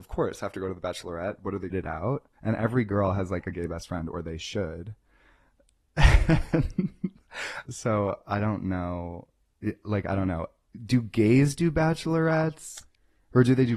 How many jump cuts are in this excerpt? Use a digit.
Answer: 3